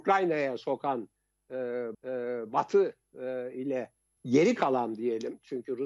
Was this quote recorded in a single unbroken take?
no; 2 cuts; at 1.9 s, 4.2 s

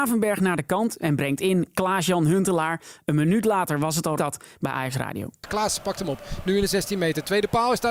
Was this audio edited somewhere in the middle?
yes; 1 cut; at 4.2 s

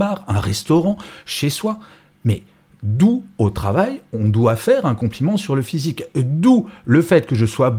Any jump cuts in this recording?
no; 0 cuts

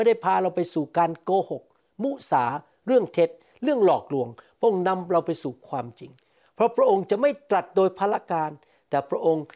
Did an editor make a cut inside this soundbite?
no; 0 cuts

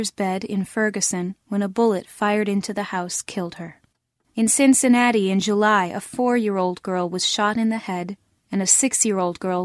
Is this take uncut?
yes; 0 cuts

